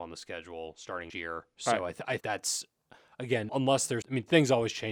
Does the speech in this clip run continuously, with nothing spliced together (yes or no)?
no